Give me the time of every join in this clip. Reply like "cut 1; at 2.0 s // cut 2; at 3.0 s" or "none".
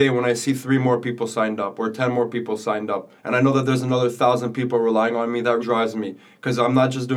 cut 1; at 3.2 s // cut 2; at 5.6 s